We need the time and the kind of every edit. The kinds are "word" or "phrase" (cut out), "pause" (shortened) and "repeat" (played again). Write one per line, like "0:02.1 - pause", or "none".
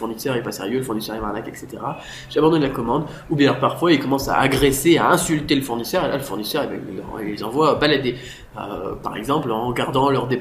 none